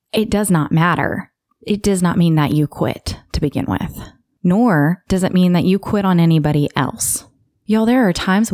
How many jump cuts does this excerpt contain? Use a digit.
0